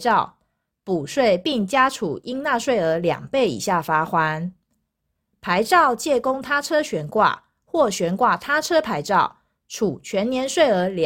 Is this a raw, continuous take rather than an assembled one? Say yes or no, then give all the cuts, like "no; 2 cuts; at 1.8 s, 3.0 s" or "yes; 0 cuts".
yes; 0 cuts